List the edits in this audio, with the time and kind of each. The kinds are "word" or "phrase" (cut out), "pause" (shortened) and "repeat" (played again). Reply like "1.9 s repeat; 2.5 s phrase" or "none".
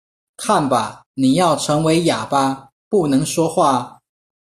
1.1 s pause